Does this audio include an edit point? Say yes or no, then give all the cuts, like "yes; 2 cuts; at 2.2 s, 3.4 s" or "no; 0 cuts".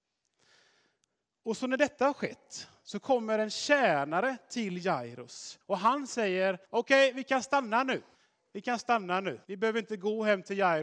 yes; 4 cuts; at 5.6 s, 6.6 s, 8.1 s, 9.4 s